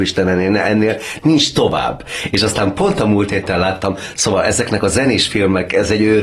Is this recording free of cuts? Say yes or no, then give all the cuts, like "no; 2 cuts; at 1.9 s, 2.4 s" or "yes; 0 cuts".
yes; 0 cuts